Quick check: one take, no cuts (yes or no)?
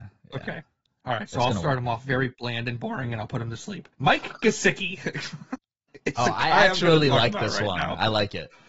no